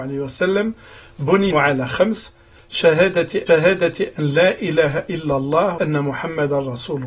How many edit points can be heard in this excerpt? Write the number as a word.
three